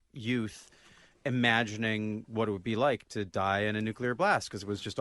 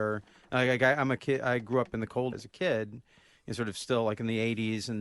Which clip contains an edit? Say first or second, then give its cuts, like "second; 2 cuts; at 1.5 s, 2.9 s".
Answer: second; 1 cut; at 2.3 s